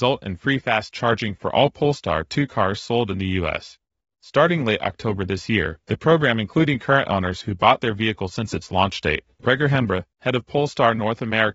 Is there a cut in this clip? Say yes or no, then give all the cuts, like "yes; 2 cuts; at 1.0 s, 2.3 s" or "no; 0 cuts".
no; 0 cuts